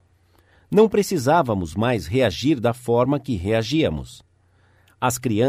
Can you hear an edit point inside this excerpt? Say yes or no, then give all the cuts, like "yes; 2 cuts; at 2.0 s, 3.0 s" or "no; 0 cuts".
no; 0 cuts